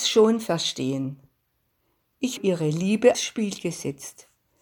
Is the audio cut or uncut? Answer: cut